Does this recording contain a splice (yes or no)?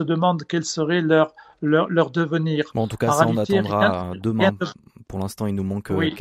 no